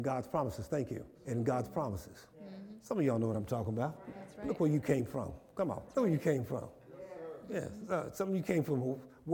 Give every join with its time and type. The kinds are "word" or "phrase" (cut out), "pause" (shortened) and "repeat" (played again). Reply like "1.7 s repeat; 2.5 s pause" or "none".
1.1 s pause; 2.3 s pause; 4.0 s pause; 5.9 s pause